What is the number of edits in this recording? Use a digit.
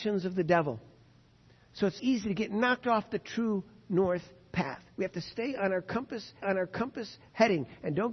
2